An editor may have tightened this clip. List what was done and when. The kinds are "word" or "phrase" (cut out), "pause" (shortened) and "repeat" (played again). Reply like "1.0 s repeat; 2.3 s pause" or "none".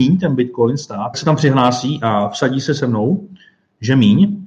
1.1 s phrase